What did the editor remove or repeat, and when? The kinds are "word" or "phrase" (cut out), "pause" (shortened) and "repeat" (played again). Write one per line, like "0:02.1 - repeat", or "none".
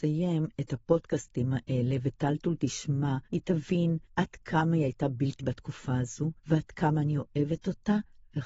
0:03.3 - pause
0:04.1 - pause
0:05.4 - word
0:06.4 - pause